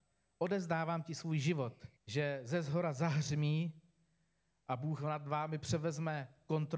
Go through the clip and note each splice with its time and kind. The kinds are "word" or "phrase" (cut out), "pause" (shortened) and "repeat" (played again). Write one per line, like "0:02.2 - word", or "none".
0:02.0 - pause